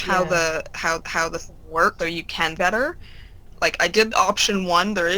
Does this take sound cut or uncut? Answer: cut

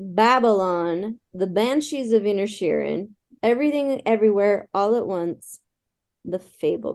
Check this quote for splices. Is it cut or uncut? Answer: uncut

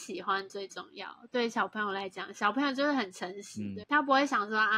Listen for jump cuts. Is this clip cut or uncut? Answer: cut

